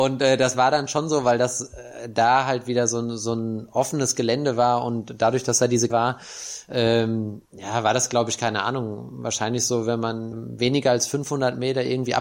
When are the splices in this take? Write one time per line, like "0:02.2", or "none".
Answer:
0:05.9
0:07.5
0:10.3